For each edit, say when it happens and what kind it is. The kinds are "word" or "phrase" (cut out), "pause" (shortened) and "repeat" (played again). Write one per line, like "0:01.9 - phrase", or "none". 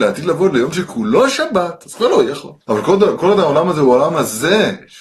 0:02.6 - pause

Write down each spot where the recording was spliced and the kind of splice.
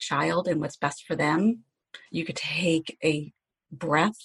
0:02.1 - pause

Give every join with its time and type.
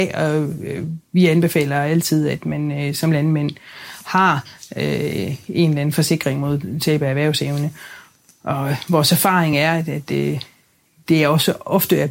none

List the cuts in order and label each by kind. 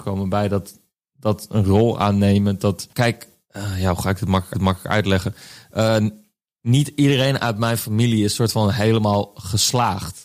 0:02.9 - pause
0:04.5 - repeat

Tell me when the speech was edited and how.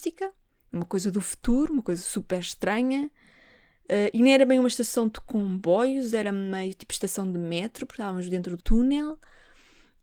0:08.6 - word

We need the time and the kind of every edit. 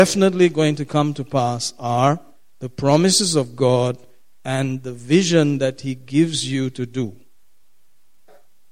none

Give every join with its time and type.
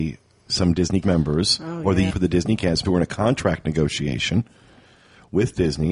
0:01.0 - word
0:02.1 - word
0:02.8 - word

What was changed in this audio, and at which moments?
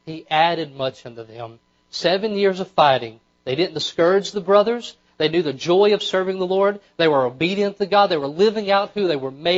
none

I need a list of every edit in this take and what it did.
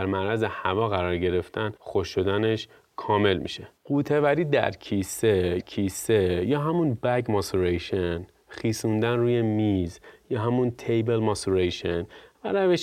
0:01.8 - pause
0:03.8 - pause
0:05.6 - repeat

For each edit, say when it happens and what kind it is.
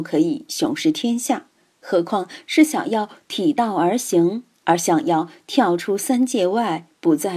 none

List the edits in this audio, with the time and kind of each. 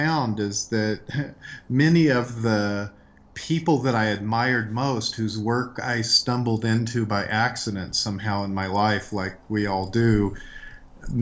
none

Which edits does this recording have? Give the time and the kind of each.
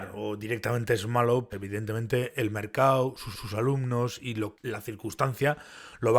0:01.5 - word
0:03.3 - repeat
0:04.5 - word

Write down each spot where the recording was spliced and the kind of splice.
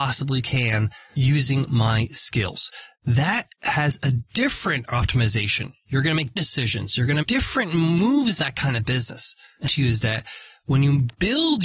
0:02.9 - pause
0:06.4 - word
0:07.2 - word
0:08.4 - phrase
0:09.7 - phrase

